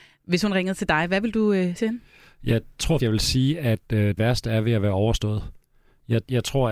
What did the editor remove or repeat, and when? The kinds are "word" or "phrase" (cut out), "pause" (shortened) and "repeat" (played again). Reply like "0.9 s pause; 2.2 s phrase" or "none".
1.8 s word; 3.0 s word; 4.2 s word